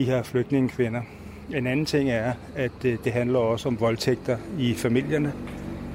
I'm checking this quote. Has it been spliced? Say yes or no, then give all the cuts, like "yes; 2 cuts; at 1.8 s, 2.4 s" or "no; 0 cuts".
no; 0 cuts